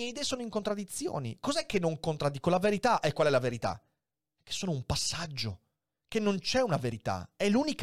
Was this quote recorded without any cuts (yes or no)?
yes